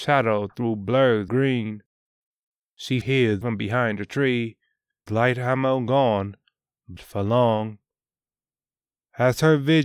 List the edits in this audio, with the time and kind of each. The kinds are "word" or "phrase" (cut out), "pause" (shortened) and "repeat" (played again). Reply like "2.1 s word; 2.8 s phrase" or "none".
1.3 s word; 3.0 s word; 3.4 s word; 5.1 s word; 7.0 s word